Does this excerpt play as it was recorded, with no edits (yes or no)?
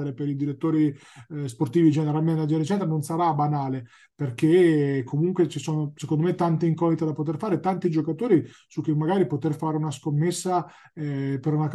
yes